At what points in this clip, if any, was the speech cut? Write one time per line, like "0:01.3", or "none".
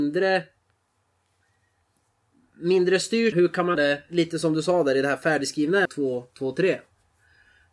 0:03.3
0:03.7
0:05.8